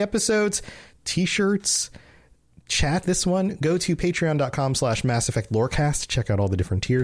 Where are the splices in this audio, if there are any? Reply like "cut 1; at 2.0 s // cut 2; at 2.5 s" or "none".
cut 1; at 3.0 s